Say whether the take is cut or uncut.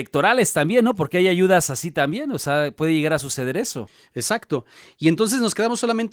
uncut